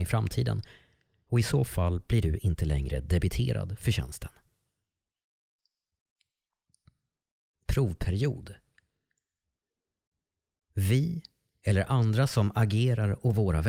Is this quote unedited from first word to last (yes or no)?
yes